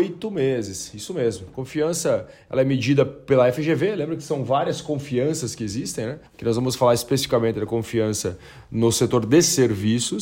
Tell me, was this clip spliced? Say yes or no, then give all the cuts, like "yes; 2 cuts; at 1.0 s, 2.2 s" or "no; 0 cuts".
yes; 1 cut; at 6.3 s